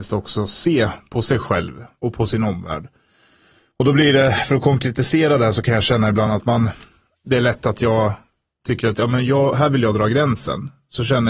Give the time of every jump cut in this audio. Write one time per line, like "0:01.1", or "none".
none